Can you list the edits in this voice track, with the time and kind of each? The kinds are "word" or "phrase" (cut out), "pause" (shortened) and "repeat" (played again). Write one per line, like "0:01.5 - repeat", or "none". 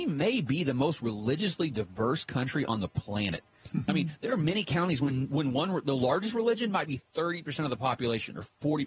none